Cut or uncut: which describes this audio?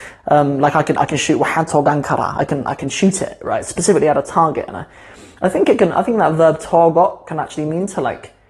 uncut